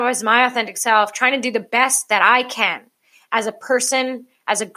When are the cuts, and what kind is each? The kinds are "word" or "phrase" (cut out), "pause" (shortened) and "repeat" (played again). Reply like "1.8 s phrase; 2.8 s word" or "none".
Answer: none